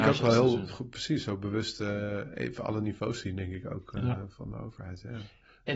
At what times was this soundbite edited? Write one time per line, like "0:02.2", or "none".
none